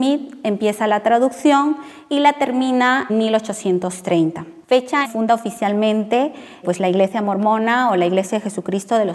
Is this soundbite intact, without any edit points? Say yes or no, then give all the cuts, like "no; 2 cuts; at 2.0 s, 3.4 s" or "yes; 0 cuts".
no; 3 cuts; at 3.1 s, 5.0 s, 6.6 s